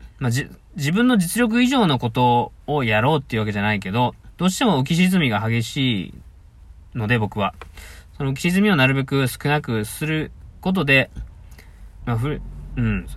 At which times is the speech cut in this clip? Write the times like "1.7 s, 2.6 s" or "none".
2.6 s, 12.0 s